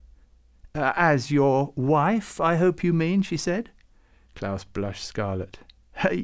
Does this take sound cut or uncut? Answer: uncut